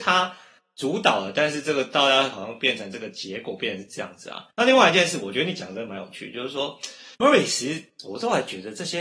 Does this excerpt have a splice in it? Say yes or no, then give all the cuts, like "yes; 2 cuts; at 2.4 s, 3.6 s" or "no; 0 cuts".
yes; 2 cuts; at 4.5 s, 7.1 s